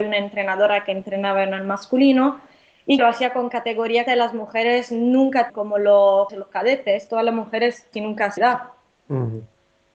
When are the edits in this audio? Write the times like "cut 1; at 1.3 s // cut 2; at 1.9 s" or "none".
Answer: cut 1; at 3.0 s // cut 2; at 4.1 s // cut 3; at 5.5 s // cut 4; at 6.3 s // cut 5; at 7.9 s // cut 6; at 8.4 s